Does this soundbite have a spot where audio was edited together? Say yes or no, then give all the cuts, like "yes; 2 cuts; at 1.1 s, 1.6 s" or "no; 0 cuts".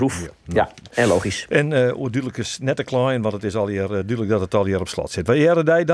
no; 0 cuts